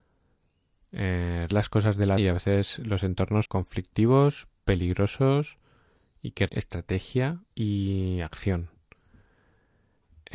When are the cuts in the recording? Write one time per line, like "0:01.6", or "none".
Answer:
0:01.5
0:02.2
0:03.5
0:04.6
0:06.5
0:07.5